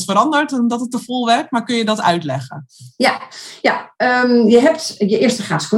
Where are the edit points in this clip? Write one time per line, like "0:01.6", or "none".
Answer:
none